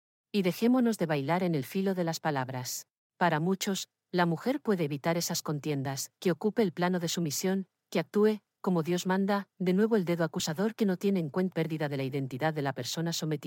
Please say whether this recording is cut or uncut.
cut